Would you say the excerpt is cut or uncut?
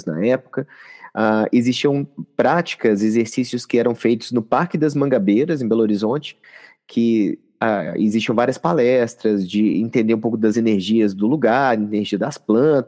uncut